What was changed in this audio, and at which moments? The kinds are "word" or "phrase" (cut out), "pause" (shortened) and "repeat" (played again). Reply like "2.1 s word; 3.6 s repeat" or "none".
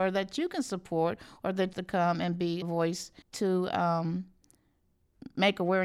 1.7 s phrase; 2.6 s word; 3.2 s pause